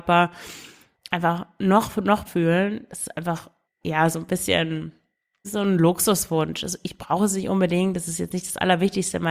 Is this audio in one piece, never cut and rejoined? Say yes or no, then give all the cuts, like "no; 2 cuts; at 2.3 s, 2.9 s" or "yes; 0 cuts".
no; 3 cuts; at 2.2 s, 3.6 s, 5.4 s